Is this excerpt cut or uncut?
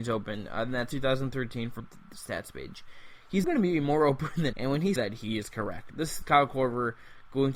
cut